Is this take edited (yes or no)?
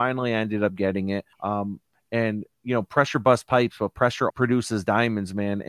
yes